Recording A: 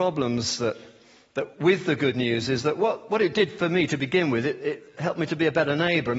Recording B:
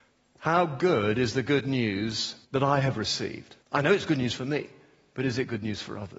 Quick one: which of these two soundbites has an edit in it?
B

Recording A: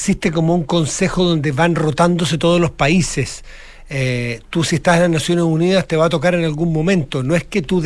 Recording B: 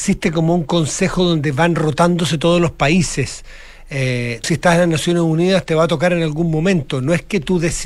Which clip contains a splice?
B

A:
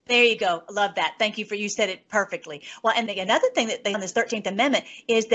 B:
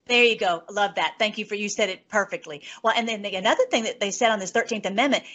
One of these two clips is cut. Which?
A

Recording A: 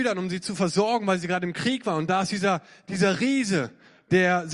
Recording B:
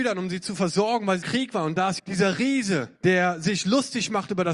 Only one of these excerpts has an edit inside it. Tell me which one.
B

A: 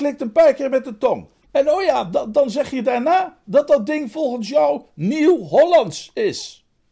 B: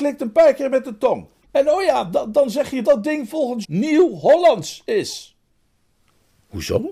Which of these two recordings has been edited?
B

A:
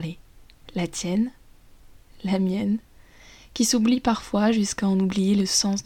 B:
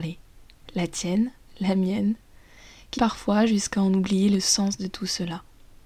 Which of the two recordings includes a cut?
B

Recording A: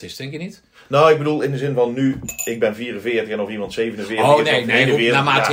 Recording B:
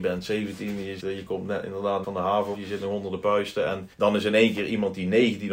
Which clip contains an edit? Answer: B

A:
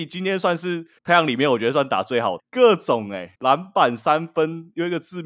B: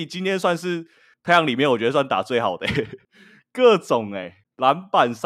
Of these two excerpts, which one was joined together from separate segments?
A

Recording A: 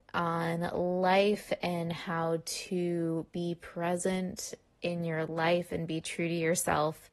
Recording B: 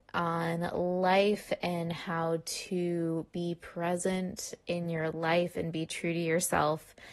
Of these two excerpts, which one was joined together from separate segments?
B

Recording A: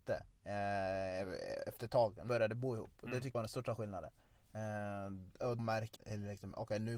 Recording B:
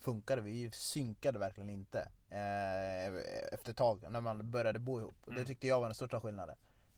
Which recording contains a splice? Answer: A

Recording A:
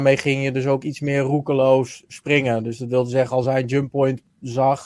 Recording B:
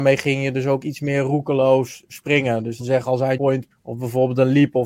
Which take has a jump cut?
B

